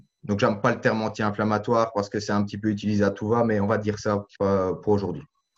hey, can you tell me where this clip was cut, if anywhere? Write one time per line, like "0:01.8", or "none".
0:04.3